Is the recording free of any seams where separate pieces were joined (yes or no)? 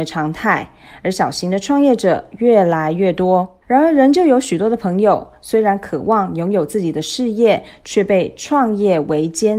no